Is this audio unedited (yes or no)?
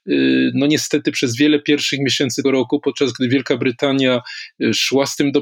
no